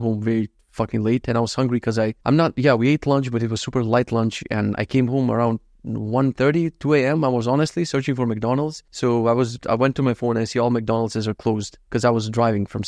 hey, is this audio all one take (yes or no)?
no